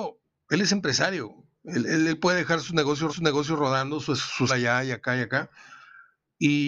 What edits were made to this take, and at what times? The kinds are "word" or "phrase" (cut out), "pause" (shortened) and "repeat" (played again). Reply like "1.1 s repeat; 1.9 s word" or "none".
3.1 s repeat; 4.5 s phrase